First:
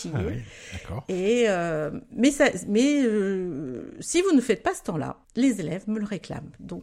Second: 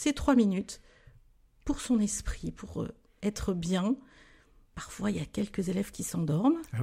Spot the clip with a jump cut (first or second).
first